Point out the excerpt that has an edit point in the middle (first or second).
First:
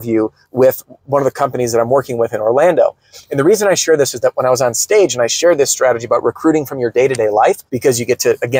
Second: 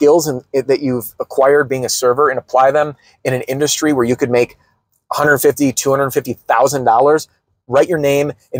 first